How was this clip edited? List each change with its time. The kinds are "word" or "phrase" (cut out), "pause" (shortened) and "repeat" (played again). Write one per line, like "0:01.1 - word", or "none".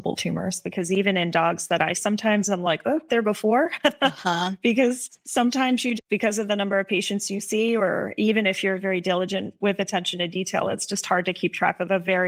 0:01.9 - phrase
0:03.1 - phrase
0:06.0 - word
0:08.8 - word